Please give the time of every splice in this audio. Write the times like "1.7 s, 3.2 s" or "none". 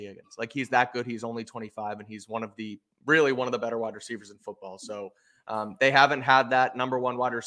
none